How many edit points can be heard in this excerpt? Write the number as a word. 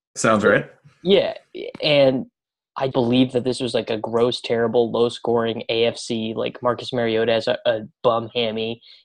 two